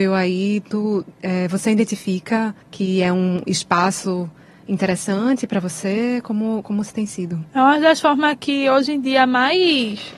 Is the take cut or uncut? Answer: cut